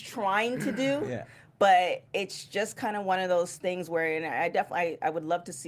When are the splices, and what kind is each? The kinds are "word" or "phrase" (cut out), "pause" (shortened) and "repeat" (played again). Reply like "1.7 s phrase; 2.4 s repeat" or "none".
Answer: none